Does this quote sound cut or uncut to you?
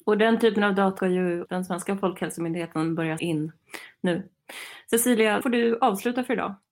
cut